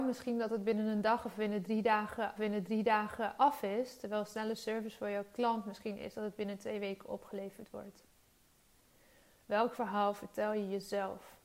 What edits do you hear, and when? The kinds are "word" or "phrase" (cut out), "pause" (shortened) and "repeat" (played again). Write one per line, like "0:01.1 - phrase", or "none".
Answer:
0:02.4 - repeat